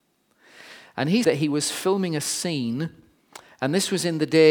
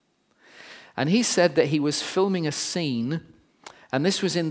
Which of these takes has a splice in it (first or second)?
first